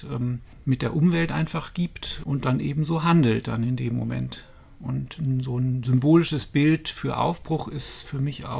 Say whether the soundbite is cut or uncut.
uncut